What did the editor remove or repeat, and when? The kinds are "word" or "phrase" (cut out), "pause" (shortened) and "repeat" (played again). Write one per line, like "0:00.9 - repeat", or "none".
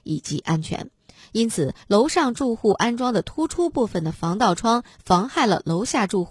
0:01.8 - phrase